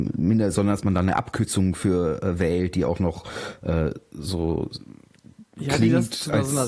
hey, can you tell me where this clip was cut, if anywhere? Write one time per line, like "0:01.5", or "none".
none